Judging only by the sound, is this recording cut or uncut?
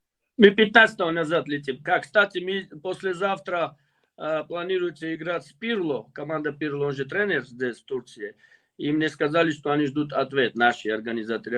uncut